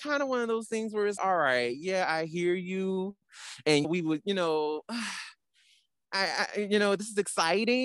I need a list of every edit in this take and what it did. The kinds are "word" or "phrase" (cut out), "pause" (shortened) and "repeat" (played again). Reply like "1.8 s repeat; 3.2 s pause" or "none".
1.2 s word; 3.8 s word